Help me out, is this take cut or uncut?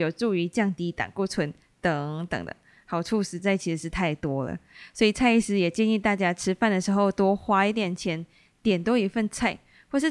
uncut